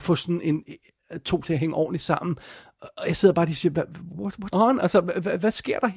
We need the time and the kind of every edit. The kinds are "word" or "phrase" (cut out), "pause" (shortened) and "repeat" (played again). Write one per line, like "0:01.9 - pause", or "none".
0:01.4 - word
0:04.1 - word
0:04.5 - word